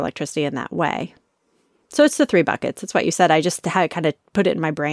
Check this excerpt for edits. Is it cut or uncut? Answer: uncut